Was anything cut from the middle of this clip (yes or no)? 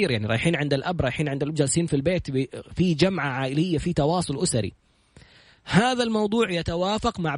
no